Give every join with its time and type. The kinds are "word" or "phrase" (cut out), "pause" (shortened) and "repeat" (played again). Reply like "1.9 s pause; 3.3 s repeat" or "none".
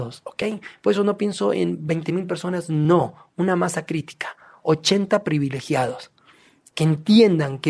none